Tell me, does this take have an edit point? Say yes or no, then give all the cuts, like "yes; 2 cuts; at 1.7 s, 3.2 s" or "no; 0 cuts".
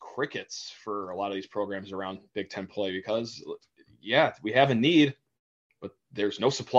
no; 0 cuts